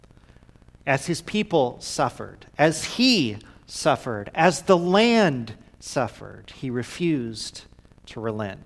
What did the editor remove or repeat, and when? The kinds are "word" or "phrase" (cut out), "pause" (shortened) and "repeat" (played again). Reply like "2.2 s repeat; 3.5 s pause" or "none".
none